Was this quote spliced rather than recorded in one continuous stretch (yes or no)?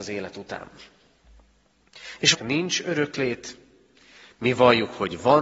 yes